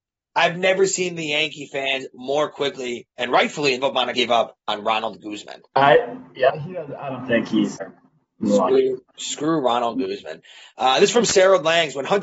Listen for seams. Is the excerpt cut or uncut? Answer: cut